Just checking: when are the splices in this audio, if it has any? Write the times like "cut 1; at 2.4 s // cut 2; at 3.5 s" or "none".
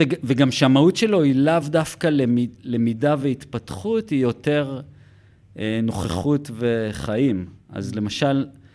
none